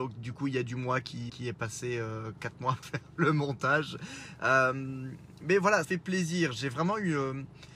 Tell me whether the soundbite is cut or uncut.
cut